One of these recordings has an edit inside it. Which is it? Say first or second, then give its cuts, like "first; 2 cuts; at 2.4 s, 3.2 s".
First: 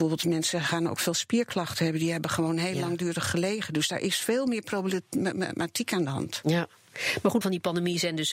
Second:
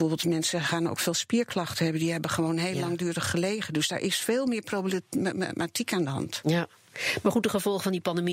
first; 1 cut; at 7.4 s